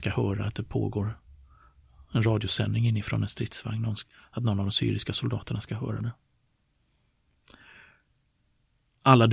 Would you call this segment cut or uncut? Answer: uncut